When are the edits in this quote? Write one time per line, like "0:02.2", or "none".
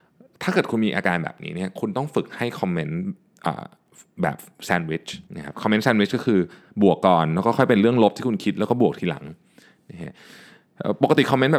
0:05.3